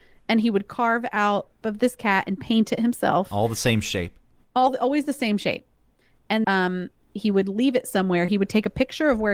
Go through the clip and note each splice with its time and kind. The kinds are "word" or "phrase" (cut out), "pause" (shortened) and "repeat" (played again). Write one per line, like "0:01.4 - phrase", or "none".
0:01.6 - phrase
0:06.4 - word